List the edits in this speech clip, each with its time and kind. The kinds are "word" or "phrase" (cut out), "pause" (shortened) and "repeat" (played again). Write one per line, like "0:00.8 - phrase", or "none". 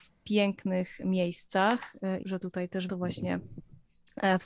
0:02.2 - word
0:02.9 - word